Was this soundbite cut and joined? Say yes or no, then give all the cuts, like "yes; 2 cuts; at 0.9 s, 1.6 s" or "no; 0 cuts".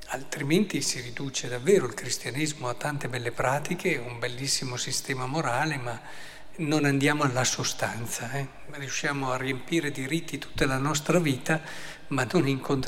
no; 0 cuts